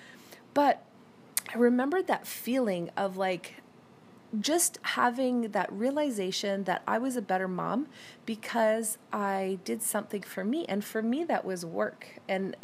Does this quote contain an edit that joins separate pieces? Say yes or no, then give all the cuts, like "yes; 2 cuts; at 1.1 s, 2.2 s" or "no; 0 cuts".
no; 0 cuts